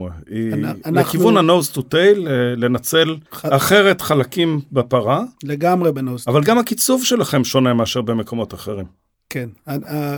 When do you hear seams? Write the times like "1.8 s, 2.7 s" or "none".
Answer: 3.3 s, 9.1 s